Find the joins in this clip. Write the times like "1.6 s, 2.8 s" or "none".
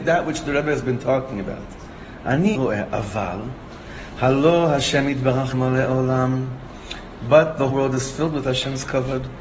2.5 s, 5.5 s, 7.7 s